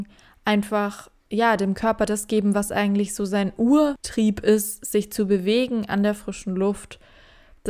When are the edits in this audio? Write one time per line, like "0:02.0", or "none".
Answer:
none